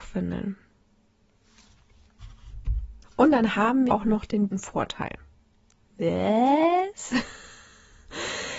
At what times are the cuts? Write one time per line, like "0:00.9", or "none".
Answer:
0:03.0
0:03.9
0:04.5